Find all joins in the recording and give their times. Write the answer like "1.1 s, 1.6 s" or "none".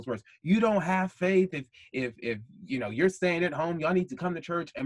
none